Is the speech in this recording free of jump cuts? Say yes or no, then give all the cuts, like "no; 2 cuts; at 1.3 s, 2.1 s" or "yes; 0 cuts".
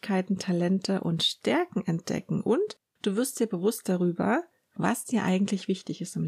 yes; 0 cuts